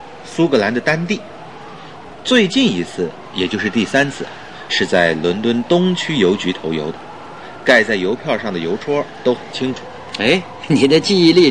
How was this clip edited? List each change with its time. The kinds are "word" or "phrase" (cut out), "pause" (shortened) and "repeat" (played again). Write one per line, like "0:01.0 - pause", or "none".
0:04.7 - word